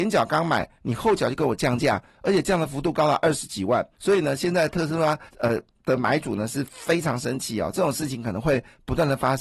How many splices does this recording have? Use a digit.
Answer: 2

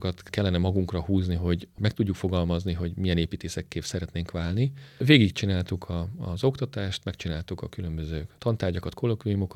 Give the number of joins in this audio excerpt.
0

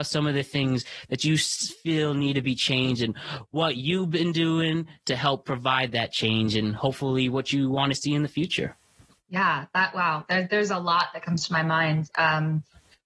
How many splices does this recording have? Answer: 0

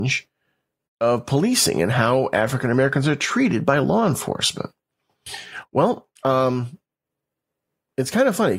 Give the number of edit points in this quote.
1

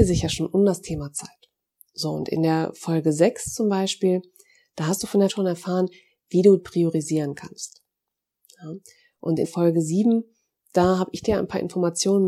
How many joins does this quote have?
3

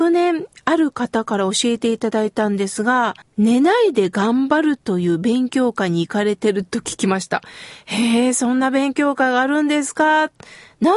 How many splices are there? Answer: 1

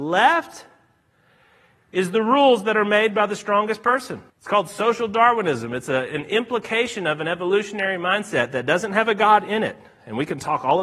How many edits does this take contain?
1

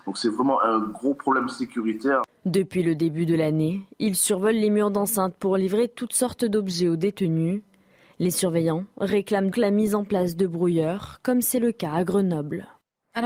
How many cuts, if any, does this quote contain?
1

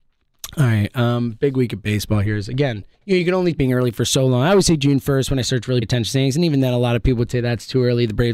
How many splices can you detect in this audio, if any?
3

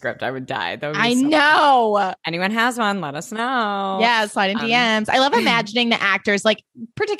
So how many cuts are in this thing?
1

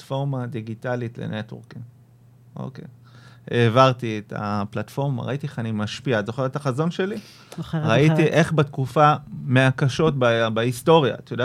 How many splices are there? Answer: 0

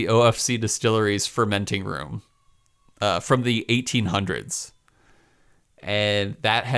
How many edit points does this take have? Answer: 0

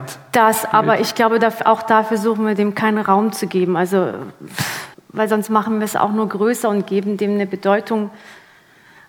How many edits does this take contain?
1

